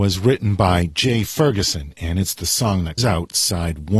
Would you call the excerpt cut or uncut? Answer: cut